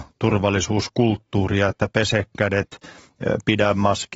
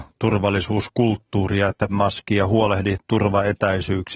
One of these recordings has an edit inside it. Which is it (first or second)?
second